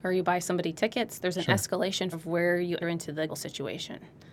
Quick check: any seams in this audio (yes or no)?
yes